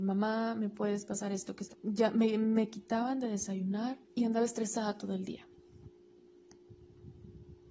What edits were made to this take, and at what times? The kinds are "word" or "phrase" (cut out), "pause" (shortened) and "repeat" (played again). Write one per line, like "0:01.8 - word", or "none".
0:01.7 - phrase
0:04.0 - pause

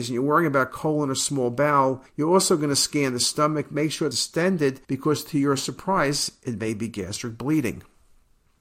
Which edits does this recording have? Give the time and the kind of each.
0:02.1 - pause
0:04.1 - word
0:04.8 - pause

